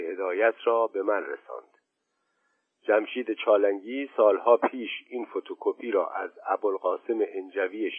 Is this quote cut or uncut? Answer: uncut